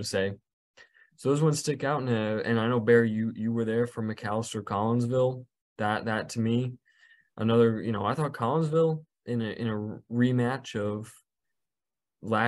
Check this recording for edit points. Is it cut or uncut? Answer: uncut